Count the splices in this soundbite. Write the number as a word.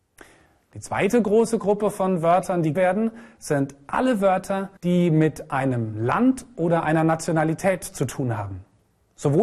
two